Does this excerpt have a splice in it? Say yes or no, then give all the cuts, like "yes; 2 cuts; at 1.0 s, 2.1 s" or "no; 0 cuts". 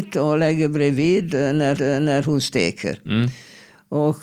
yes; 1 cut; at 1.8 s